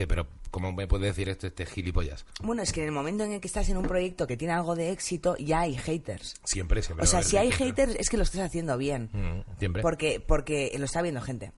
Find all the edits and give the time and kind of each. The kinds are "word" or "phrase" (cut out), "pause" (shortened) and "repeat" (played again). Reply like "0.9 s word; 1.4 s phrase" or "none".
none